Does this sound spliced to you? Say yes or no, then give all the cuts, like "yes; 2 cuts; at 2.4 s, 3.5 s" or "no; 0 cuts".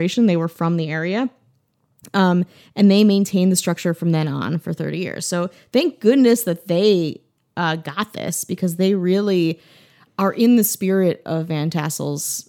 no; 0 cuts